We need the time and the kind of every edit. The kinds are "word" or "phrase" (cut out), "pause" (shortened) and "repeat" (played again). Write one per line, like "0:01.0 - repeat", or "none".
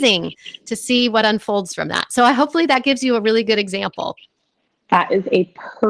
none